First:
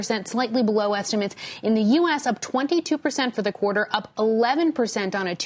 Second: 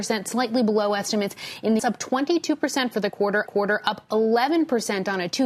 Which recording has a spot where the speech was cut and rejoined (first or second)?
second